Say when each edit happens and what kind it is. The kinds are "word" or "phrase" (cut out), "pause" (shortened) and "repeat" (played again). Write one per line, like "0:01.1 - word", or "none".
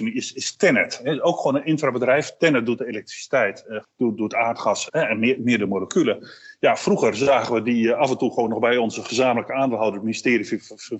0:03.8 - word
0:04.9 - word
0:05.4 - word